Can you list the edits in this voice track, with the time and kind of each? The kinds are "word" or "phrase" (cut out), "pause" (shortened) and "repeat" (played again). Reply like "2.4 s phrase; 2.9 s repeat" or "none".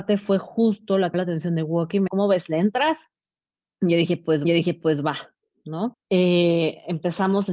1.1 s phrase; 2.1 s word; 4.4 s repeat